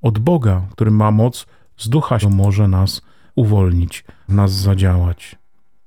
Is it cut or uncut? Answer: cut